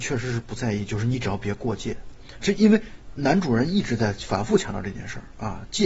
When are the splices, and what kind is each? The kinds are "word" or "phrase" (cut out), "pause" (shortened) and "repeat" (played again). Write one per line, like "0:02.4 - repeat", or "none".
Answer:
0:02.4 - word